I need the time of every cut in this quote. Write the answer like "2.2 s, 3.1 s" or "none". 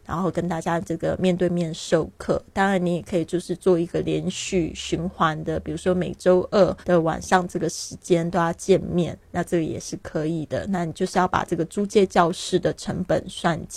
6.8 s

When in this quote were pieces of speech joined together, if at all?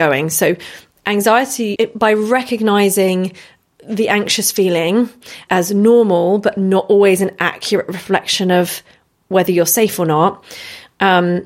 1.8 s, 5.5 s

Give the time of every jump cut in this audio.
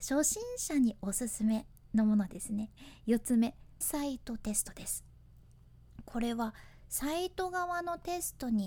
3.8 s

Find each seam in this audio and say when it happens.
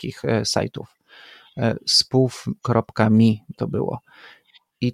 3.5 s

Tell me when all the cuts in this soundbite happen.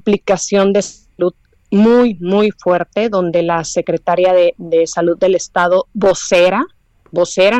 none

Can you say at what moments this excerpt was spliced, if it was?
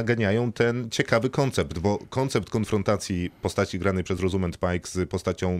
none

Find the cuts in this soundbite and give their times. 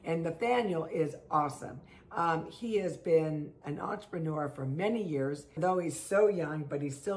3.6 s, 5.6 s

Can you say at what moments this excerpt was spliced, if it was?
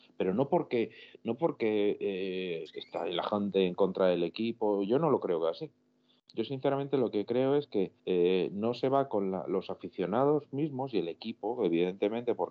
8.0 s

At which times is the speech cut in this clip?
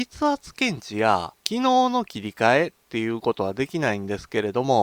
1.4 s

